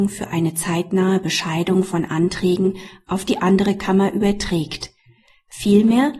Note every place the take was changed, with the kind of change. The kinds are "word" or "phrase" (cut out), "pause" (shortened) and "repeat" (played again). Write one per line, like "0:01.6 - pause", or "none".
none